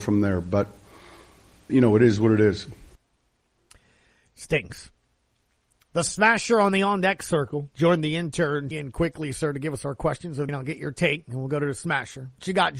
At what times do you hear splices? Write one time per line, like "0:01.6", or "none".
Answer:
0:01.7
0:08.7
0:10.5